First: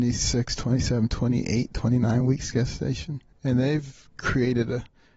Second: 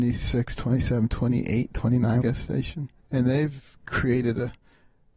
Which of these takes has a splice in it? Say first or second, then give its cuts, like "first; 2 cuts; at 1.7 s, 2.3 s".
second; 1 cut; at 2.2 s